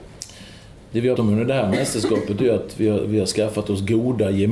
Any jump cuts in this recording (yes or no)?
yes